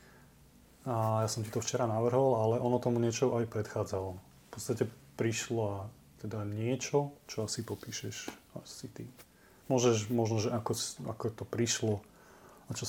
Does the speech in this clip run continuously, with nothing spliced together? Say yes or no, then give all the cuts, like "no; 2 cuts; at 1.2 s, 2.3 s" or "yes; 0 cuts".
yes; 0 cuts